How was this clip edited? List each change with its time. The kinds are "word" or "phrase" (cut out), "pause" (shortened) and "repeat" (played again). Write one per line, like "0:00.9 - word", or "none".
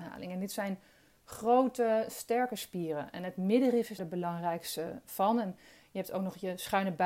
0:04.0 - word